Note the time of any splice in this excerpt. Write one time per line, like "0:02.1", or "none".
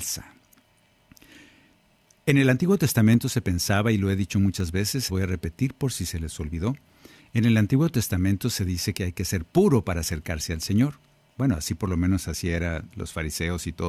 0:05.1